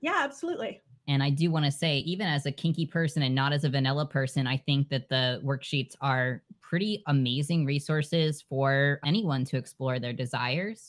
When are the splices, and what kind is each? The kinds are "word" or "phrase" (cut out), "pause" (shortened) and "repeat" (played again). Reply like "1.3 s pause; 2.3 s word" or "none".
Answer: none